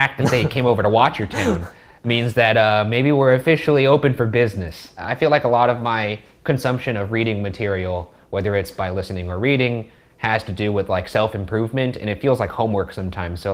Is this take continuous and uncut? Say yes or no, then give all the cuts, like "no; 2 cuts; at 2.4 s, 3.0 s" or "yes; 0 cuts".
yes; 0 cuts